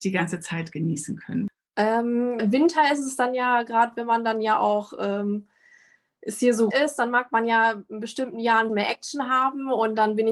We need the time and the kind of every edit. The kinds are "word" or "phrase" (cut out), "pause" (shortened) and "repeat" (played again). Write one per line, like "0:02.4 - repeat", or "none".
0:02.4 - word
0:06.7 - word
0:08.7 - word